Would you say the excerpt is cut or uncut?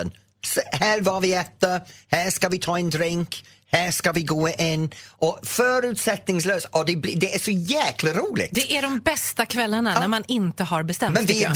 uncut